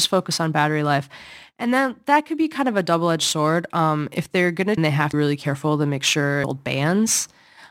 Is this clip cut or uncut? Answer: cut